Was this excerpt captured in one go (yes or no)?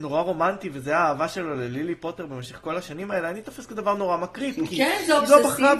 yes